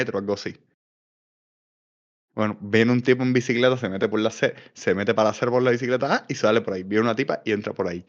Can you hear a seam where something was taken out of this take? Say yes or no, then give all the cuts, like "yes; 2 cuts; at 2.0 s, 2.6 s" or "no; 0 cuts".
no; 0 cuts